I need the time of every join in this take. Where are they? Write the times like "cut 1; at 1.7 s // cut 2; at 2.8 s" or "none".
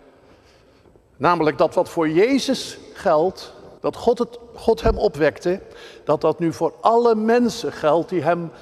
cut 1; at 3.8 s